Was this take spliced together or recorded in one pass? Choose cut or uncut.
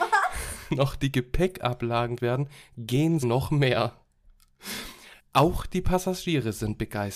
cut